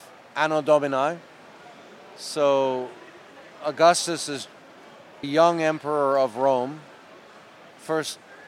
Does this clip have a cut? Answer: yes; 1 cut; at 5.2 s

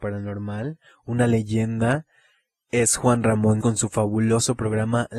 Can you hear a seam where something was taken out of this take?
yes; 1 cut; at 3.6 s

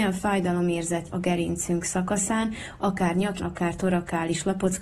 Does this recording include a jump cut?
yes; 2 cuts; at 1.1 s, 3.4 s

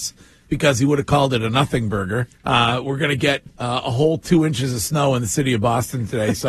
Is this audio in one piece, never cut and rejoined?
no; 2 cuts; at 2.3 s, 3.5 s

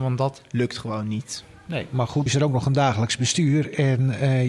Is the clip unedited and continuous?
no; 1 cut; at 2.3 s

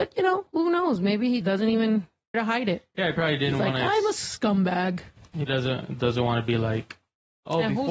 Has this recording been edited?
yes; 3 cuts; at 1.4 s, 2.3 s, 5.5 s

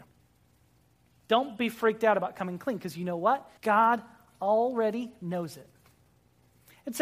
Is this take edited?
yes; 1 cut; at 3.6 s

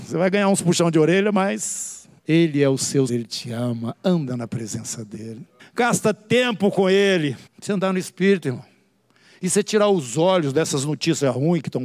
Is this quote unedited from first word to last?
no; 4 cuts; at 2.2 s, 3.1 s, 5.6 s, 7.5 s

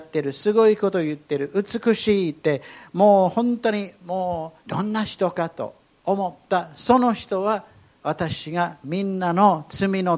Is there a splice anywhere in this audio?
yes; 1 cut; at 4.6 s

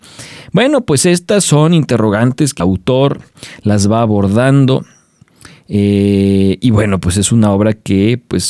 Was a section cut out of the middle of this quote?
yes; 1 cut; at 2.6 s

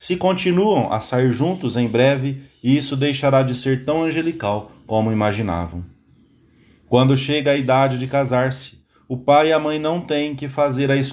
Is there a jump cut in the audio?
no; 0 cuts

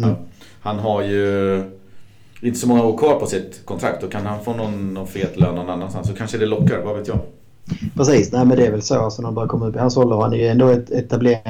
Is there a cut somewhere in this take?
no; 0 cuts

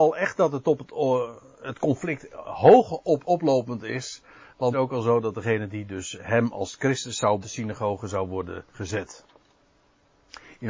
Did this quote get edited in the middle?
yes; 4 cuts; at 3.2 s, 4.7 s, 7.4 s, 8.7 s

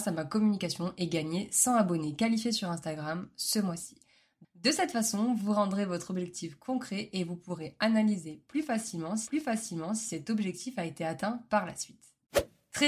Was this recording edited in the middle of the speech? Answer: yes; 1 cut; at 9.2 s

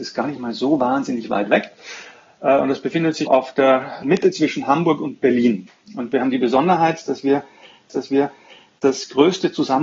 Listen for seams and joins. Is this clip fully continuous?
no; 3 cuts; at 3.3 s, 4.0 s, 7.9 s

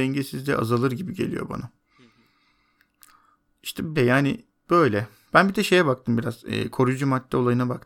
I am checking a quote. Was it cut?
yes; 1 cut; at 4.0 s

